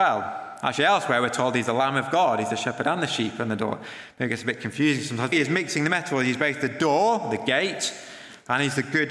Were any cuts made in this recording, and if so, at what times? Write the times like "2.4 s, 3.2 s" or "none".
5.3 s